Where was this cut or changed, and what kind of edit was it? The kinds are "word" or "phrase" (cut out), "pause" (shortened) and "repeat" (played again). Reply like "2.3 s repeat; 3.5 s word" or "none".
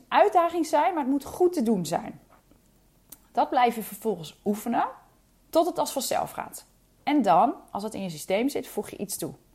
none